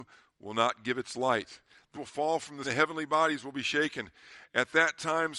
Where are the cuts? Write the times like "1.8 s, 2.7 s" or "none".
1.9 s, 2.6 s

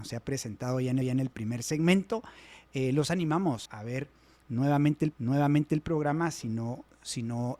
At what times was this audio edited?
1.0 s, 3.7 s, 5.1 s

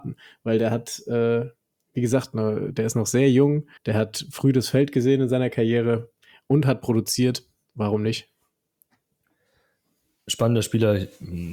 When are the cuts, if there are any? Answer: 3.8 s

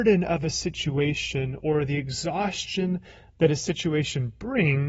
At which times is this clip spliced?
none

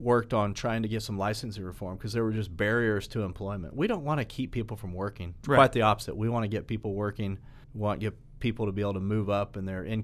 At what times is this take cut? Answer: 7.6 s

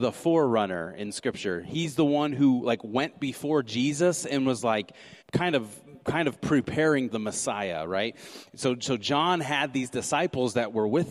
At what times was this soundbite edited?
5.2 s, 6.0 s, 7.1 s

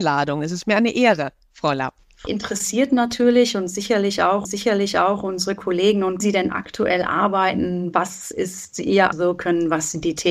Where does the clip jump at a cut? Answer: 2.3 s, 4.4 s, 6.2 s, 9.1 s

